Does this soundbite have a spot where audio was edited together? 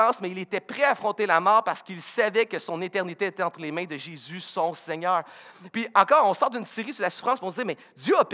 no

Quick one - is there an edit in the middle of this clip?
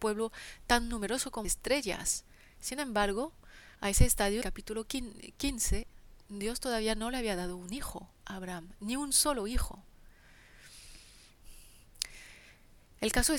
yes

